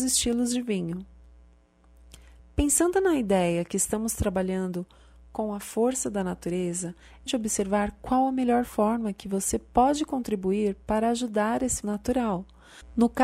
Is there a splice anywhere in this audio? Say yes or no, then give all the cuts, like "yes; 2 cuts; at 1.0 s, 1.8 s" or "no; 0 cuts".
yes; 2 cuts; at 7.3 s, 11.8 s